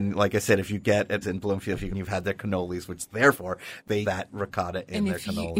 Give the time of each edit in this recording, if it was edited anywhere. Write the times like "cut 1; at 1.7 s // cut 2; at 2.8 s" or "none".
cut 1; at 1.2 s // cut 2; at 1.9 s // cut 3; at 3.3 s // cut 4; at 4.0 s